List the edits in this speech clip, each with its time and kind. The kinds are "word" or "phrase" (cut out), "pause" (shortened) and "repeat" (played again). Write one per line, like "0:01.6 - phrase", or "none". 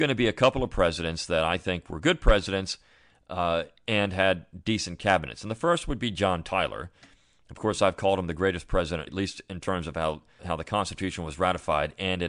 0:09.1 - phrase
0:10.4 - word